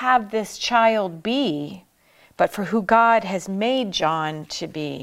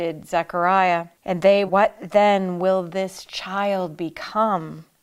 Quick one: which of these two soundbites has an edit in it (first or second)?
second